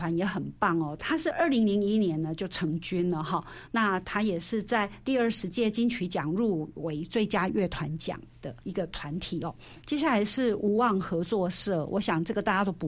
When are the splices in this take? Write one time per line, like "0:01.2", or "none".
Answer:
0:08.6